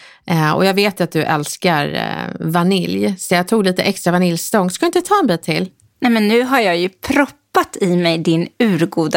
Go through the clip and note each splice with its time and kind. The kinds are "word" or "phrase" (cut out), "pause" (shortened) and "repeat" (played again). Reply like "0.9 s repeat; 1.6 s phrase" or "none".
none